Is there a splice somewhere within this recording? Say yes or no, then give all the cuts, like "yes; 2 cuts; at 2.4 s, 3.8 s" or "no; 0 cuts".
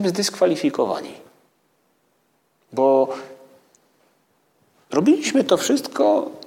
no; 0 cuts